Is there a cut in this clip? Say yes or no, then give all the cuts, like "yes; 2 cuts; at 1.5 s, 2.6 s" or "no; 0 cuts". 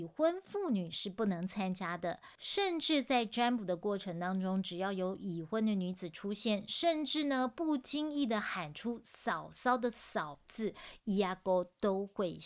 yes; 1 cut; at 2.4 s